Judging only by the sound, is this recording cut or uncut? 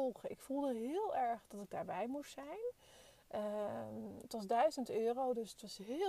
uncut